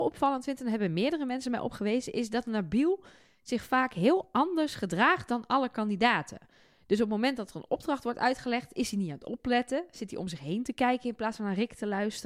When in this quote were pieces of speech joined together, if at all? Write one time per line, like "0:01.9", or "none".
none